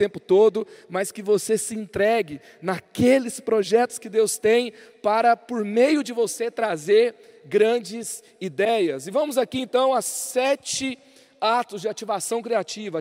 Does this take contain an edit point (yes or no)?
no